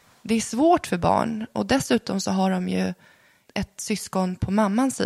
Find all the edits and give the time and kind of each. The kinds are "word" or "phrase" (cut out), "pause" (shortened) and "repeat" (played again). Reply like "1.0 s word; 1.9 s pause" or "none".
none